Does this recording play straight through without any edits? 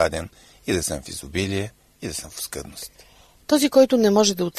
yes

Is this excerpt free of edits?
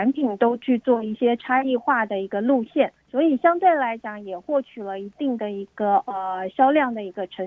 no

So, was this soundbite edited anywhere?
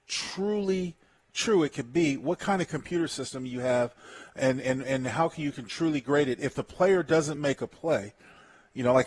no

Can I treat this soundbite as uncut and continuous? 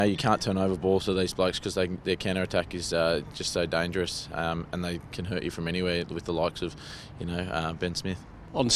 yes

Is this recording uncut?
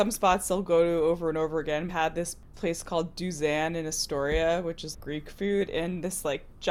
no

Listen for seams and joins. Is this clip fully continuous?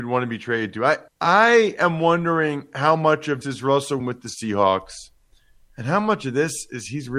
no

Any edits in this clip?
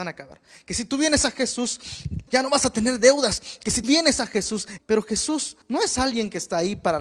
yes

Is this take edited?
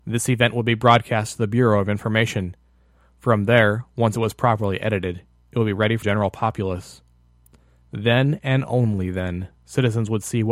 yes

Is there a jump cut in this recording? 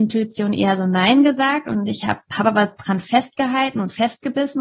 no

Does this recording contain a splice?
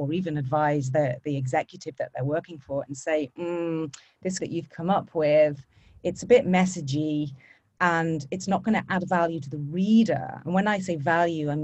yes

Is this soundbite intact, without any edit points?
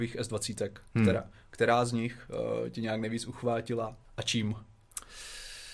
no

